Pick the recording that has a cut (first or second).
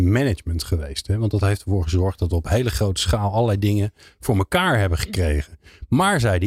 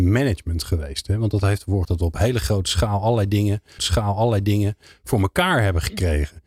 second